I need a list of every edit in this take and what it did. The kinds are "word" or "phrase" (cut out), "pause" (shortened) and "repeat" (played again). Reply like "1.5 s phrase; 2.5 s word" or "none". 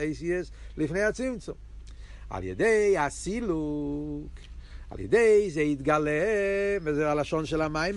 none